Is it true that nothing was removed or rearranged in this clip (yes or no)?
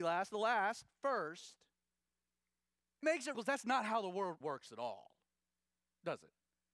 no